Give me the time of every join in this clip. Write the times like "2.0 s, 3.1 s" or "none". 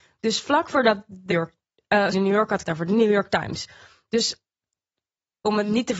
1.3 s, 2.1 s, 2.6 s